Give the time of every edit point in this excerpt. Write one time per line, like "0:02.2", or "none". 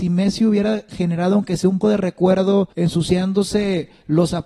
0:01.8
0:02.7